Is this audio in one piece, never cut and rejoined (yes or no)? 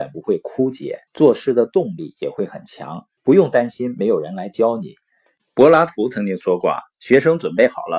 no